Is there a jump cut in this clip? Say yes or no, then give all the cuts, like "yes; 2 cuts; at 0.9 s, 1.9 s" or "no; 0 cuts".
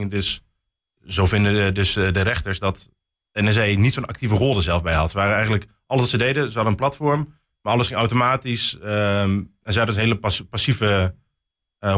no; 0 cuts